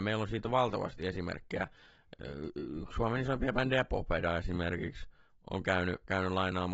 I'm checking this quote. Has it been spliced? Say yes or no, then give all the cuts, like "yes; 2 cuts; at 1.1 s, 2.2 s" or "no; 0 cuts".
no; 0 cuts